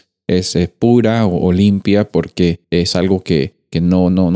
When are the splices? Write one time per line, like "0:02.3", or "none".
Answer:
0:02.6